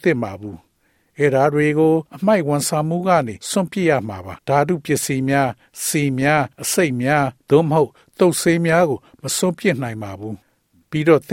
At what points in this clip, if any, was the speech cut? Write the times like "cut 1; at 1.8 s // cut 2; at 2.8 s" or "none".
cut 1; at 2.1 s // cut 2; at 3.4 s // cut 3; at 4.4 s // cut 4; at 6.5 s // cut 5; at 7.4 s